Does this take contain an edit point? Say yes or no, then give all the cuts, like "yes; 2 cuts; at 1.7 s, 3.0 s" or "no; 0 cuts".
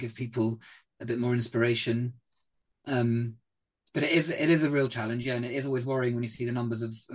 no; 0 cuts